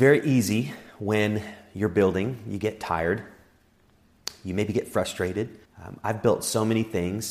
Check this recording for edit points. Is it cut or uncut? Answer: cut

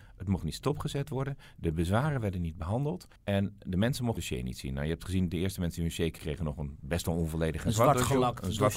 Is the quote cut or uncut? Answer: cut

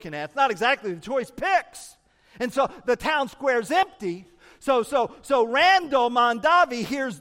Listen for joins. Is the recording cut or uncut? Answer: uncut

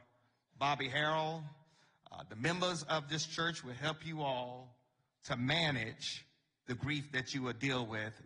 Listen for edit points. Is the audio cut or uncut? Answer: uncut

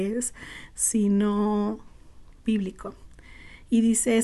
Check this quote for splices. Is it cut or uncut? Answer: cut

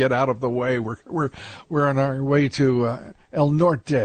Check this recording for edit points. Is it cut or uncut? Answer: uncut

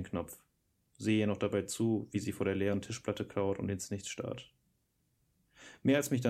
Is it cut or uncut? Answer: uncut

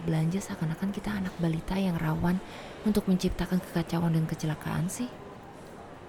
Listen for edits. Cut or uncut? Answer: uncut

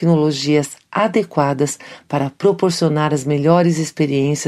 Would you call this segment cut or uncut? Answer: uncut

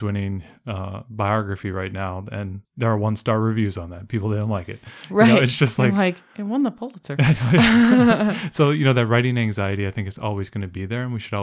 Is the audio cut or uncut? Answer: cut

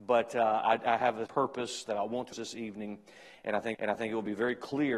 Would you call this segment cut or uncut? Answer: cut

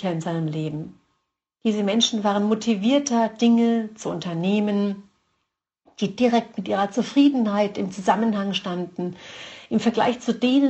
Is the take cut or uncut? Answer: uncut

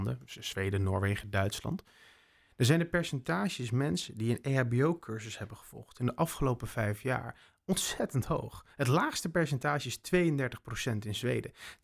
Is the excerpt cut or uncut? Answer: uncut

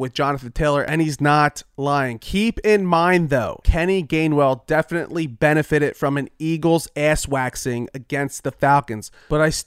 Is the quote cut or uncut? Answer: cut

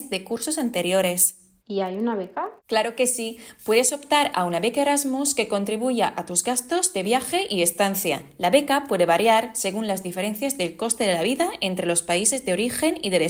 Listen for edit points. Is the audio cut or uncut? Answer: cut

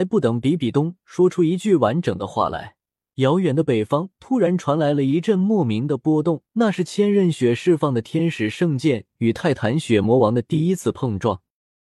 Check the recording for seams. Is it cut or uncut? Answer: cut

